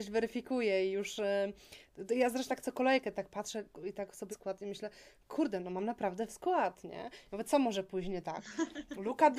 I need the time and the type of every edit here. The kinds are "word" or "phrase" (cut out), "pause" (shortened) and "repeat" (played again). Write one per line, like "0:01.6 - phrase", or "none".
0:02.5 - word
0:04.3 - word
0:06.3 - word